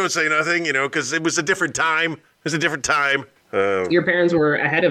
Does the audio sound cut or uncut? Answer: uncut